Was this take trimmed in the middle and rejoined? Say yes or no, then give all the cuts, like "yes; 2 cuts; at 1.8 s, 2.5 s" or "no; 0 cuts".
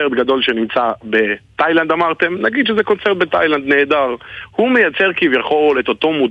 no; 0 cuts